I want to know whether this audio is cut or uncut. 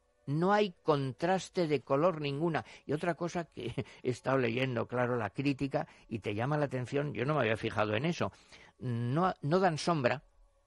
uncut